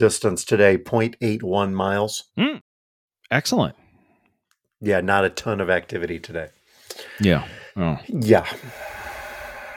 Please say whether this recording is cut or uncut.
cut